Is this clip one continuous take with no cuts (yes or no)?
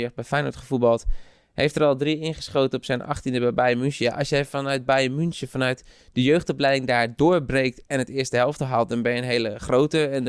yes